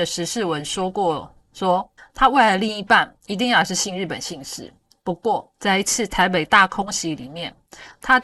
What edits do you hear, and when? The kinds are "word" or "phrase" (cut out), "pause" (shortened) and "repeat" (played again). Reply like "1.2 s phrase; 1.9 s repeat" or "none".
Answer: 2.0 s pause; 4.9 s pause; 5.5 s pause